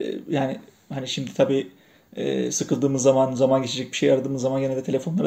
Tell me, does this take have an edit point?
no; 0 cuts

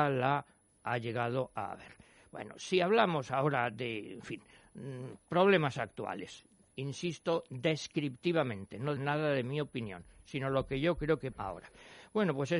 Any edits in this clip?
yes; 2 cuts; at 9.0 s, 11.3 s

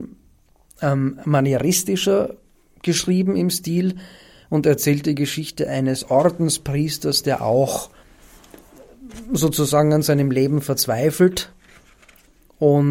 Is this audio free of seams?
yes; 0 cuts

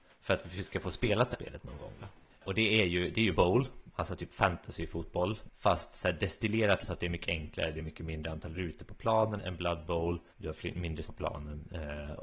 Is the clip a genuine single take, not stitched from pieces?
no; 7 cuts; at 1.3 s, 2.3 s, 3.3 s, 6.8 s, 9.4 s, 10.3 s, 11.0 s

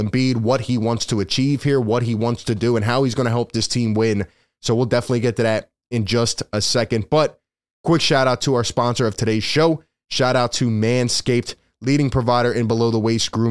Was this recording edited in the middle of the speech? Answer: no; 0 cuts

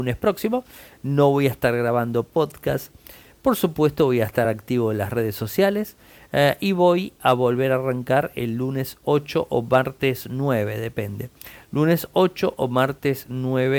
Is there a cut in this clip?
no; 0 cuts

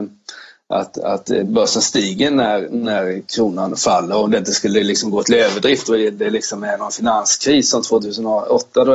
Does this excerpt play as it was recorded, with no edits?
yes; 0 cuts

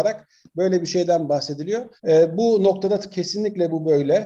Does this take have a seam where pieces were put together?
yes; 1 cut; at 2.0 s

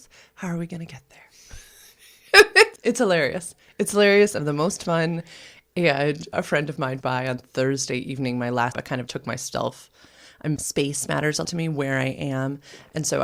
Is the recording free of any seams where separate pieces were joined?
no; 8 cuts; at 2.8 s, 4.4 s, 6.3 s, 7.0 s, 8.7 s, 9.1 s, 10.6 s, 11.4 s

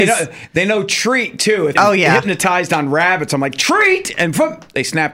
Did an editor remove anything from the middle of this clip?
yes; 1 cut; at 1.8 s

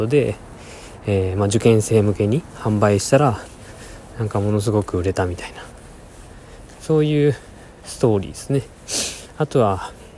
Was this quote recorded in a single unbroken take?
yes; 0 cuts

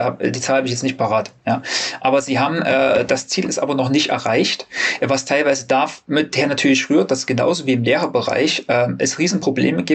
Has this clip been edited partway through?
no; 0 cuts

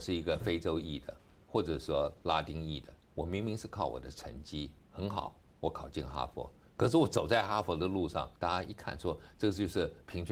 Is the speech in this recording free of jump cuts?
no; 3 cuts; at 3.0 s, 4.8 s, 8.3 s

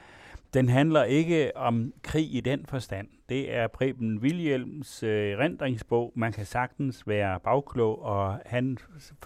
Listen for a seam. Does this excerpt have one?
no; 0 cuts

